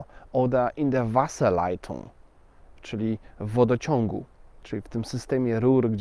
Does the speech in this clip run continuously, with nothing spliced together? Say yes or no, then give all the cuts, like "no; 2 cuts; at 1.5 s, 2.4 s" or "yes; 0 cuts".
yes; 0 cuts